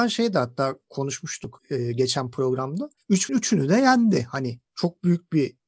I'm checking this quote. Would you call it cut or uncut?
cut